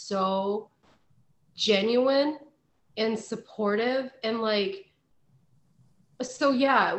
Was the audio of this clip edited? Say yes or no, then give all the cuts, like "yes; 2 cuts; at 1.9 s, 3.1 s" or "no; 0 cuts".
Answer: no; 0 cuts